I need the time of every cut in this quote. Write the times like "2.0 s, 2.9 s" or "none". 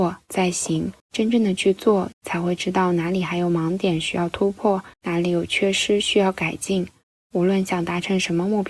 1.0 s, 2.1 s, 4.9 s